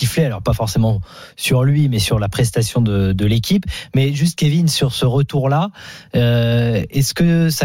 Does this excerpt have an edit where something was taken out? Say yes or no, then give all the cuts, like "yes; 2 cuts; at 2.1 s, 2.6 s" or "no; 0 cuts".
no; 0 cuts